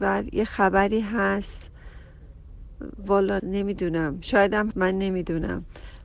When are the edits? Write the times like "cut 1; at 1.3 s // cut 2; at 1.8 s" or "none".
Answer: cut 1; at 3.4 s // cut 2; at 4.7 s